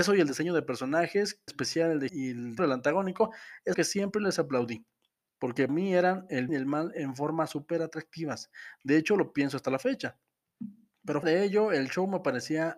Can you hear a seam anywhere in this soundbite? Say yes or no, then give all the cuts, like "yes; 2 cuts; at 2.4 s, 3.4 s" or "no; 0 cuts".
yes; 7 cuts; at 1.5 s, 2.1 s, 2.6 s, 3.7 s, 5.7 s, 6.5 s, 11.2 s